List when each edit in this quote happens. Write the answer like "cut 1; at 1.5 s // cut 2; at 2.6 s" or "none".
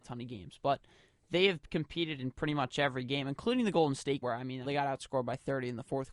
cut 1; at 4.2 s // cut 2; at 4.6 s